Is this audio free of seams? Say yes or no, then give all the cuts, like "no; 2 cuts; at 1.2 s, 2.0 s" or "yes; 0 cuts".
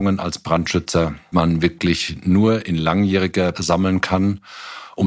no; 2 cuts; at 1.3 s, 3.5 s